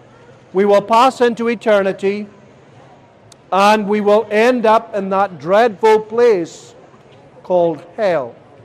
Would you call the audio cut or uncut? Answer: uncut